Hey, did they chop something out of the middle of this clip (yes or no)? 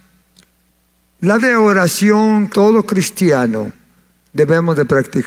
yes